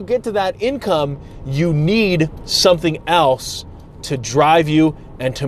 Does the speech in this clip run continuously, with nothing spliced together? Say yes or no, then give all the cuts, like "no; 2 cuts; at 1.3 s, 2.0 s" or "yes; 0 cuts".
yes; 0 cuts